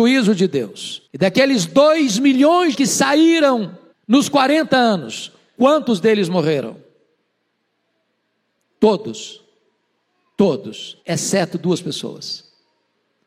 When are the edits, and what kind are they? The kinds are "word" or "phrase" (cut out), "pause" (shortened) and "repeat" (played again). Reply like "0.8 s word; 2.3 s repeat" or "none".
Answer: 1.1 s pause; 2.7 s phrase; 3.9 s pause; 11.0 s pause